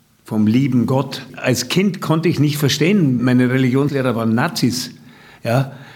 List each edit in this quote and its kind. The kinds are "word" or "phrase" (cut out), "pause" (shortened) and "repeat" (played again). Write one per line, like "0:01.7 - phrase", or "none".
none